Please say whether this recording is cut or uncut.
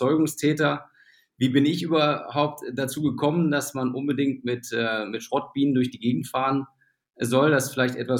uncut